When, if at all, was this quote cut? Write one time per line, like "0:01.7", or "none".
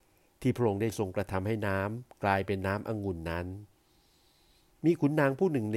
none